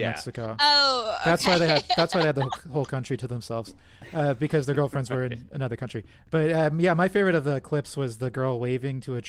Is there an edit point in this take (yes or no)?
no